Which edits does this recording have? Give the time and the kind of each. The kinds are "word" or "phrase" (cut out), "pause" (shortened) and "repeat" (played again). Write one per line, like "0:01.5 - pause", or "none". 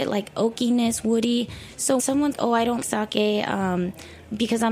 0:02.0 - word
0:02.3 - word
0:02.8 - word